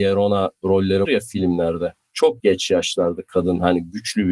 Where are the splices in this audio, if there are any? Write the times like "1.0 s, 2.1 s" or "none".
1.0 s, 2.4 s